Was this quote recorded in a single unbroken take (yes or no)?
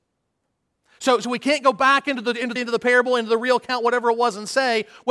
no